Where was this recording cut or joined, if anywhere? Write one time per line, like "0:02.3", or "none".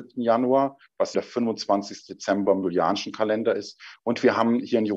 0:01.1